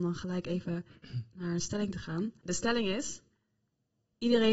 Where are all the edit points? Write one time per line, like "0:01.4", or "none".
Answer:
none